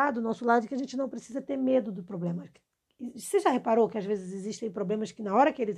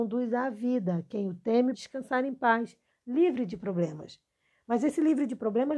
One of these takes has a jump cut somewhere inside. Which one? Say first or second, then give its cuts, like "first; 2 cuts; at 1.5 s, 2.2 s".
second; 1 cut; at 1.7 s